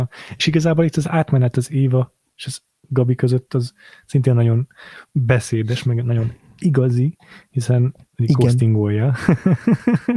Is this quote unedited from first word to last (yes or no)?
yes